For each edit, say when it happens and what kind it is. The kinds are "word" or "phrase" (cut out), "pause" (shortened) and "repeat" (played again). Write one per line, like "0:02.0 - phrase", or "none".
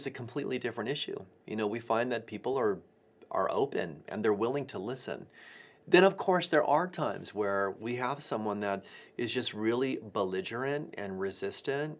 none